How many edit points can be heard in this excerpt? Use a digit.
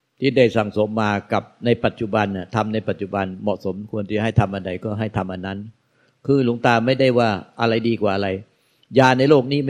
0